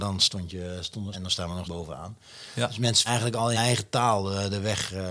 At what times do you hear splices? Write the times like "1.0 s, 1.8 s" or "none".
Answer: 1.1 s, 1.6 s, 3.1 s, 3.5 s